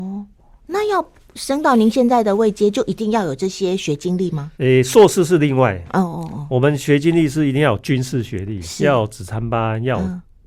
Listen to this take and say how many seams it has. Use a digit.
1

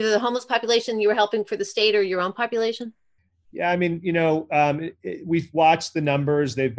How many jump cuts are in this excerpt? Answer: 1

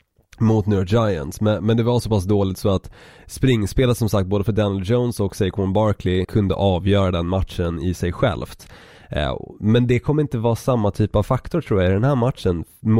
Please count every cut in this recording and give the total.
1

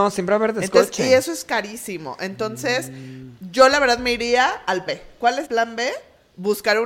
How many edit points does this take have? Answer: 2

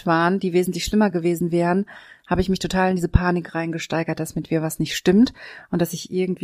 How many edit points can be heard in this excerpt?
0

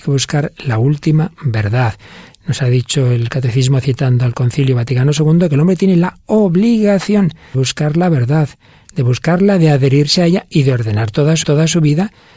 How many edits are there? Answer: 2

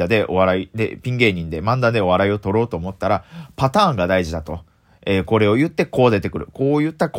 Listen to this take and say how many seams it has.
0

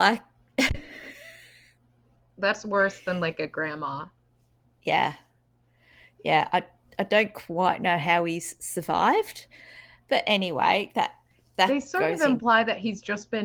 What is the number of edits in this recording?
0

